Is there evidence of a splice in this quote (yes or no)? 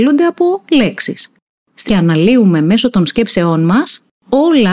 yes